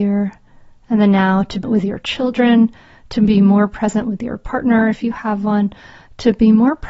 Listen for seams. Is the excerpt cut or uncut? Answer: cut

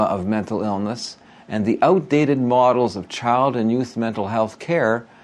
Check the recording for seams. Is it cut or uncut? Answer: uncut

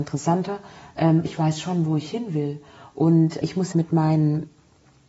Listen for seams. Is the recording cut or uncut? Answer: cut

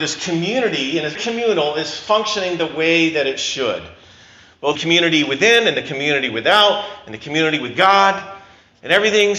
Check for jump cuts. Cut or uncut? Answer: cut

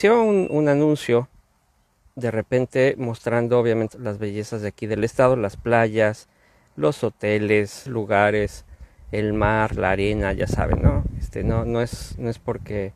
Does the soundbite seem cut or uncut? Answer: cut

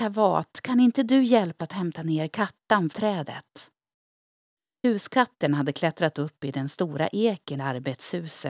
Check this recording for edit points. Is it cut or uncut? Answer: cut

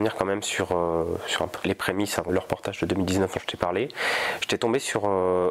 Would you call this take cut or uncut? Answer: cut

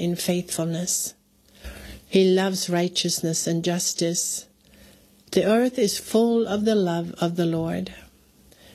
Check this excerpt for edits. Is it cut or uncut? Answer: uncut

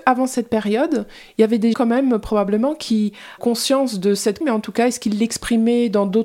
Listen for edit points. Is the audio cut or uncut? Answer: cut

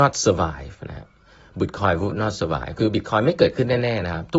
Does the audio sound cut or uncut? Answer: uncut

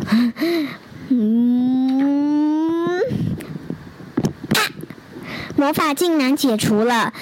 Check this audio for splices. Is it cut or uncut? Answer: cut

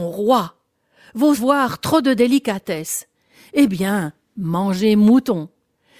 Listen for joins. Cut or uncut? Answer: cut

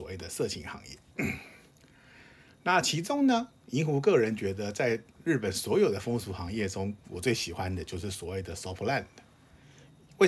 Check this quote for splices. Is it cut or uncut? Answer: uncut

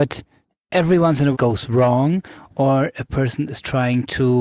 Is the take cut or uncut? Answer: cut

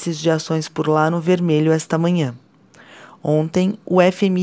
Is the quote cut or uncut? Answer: uncut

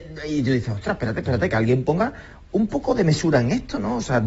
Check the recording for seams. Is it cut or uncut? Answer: uncut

